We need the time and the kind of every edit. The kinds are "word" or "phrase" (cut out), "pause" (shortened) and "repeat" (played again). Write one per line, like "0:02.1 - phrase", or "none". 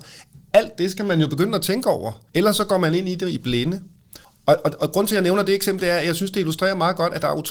0:02.3 - pause
0:04.2 - pause